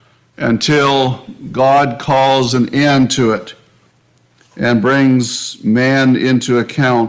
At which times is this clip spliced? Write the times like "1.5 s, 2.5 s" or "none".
none